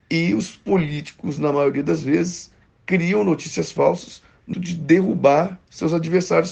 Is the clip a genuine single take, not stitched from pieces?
no; 1 cut; at 4.5 s

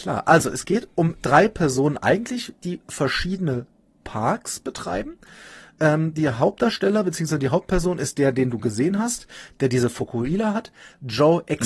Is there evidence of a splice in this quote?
no; 0 cuts

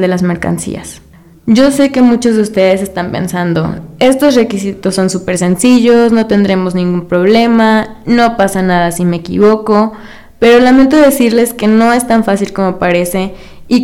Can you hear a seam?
no; 0 cuts

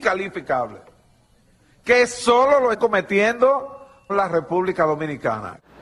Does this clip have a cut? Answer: yes; 2 cuts; at 2.7 s, 4.1 s

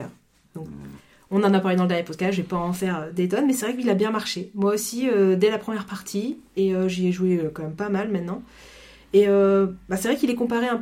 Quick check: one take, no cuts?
yes; 0 cuts

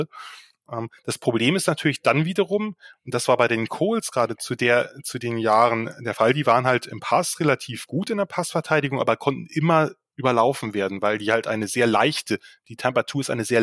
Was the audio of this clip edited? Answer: no; 0 cuts

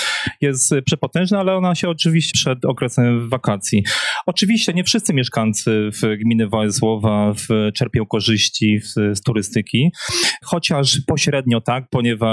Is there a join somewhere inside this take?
yes; 1 cut; at 2.3 s

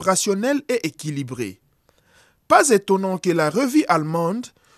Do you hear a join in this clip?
no; 0 cuts

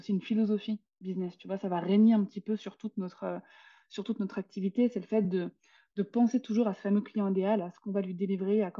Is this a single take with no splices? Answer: yes; 0 cuts

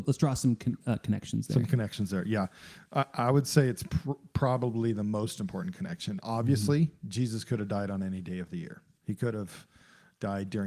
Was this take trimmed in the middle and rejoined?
no; 0 cuts

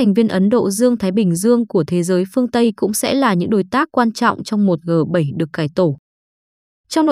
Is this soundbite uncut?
yes; 0 cuts

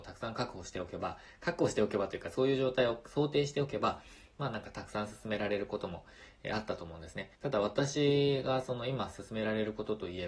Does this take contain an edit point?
yes; 1 cut; at 7.3 s

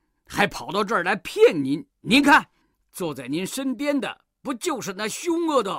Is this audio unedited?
no; 2 cuts; at 1.9 s, 2.6 s

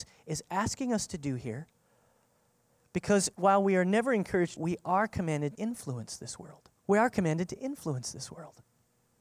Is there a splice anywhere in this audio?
yes; 4 cuts; at 3.3 s, 4.6 s, 5.6 s, 6.8 s

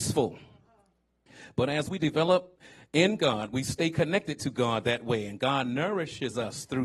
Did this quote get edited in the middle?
no; 0 cuts

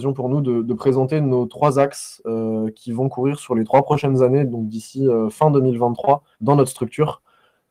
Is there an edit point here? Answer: yes; 1 cut; at 6.3 s

